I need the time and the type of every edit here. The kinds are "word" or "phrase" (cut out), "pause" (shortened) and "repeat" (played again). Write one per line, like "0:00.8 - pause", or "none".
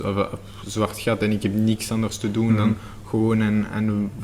none